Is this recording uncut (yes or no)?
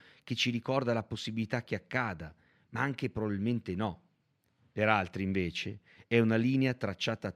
yes